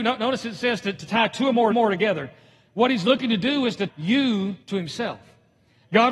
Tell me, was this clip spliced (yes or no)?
yes